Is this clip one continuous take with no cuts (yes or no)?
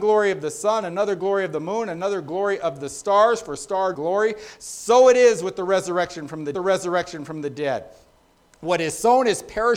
no